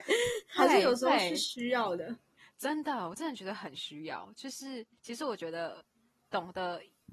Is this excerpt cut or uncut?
uncut